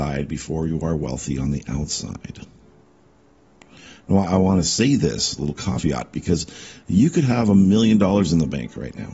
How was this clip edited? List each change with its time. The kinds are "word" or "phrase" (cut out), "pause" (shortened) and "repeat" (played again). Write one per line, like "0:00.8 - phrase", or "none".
none